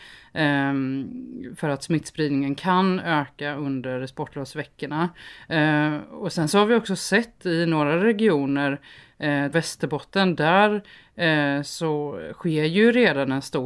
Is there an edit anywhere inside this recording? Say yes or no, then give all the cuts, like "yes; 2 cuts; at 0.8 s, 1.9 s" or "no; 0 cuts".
yes; 1 cut; at 9.5 s